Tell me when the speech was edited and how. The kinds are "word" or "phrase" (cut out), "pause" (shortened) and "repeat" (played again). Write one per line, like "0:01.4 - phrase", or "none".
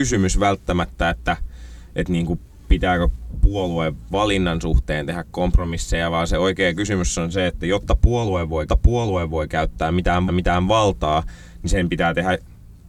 0:08.7 - repeat
0:10.3 - repeat